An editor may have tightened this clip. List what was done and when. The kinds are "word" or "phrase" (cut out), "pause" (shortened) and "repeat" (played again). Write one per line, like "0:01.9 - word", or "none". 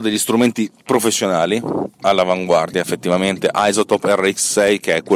none